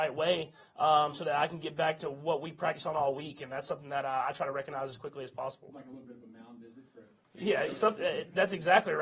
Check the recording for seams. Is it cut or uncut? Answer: uncut